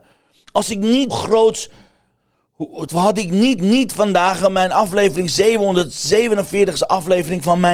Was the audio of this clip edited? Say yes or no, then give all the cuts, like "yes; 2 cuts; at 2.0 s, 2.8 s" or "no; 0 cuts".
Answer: yes; 3 cuts; at 1.1 s, 2.9 s, 3.6 s